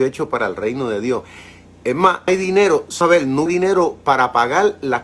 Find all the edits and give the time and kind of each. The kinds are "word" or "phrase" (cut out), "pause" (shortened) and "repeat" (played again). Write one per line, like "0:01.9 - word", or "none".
0:02.3 - word
0:03.0 - word
0:03.5 - word